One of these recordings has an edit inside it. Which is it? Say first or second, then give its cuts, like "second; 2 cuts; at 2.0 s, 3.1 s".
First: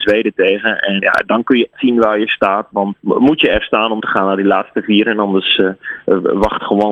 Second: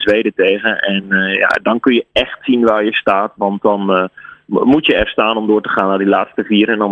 first; 4 cuts; at 1.0 s, 1.7 s, 2.9 s, 4.0 s